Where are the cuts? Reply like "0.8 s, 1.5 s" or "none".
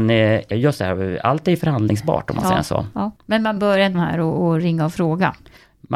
3.2 s, 3.9 s